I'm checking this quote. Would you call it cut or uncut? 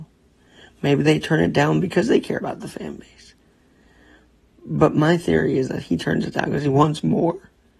uncut